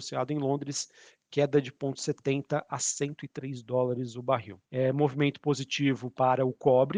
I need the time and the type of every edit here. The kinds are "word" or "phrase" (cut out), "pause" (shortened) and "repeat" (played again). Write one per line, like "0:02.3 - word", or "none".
0:04.7 - pause